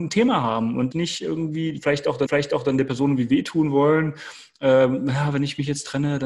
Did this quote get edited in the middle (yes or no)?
yes